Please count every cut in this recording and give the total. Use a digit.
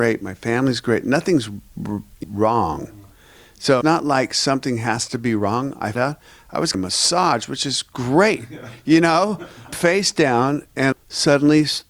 6